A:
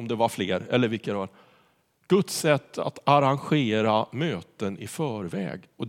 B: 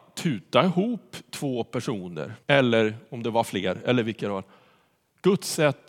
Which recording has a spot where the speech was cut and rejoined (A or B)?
B